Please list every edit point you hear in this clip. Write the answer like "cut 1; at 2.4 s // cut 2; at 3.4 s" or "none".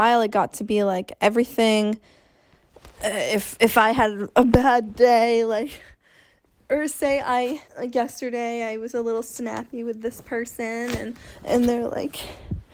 cut 1; at 7.7 s